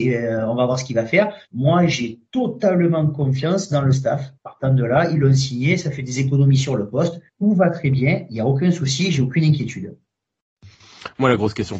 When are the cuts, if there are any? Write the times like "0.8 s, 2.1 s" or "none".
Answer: 1.4 s, 4.4 s, 7.3 s